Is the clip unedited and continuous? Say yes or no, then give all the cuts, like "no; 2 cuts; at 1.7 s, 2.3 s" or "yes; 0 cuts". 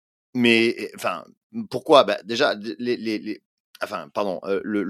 yes; 0 cuts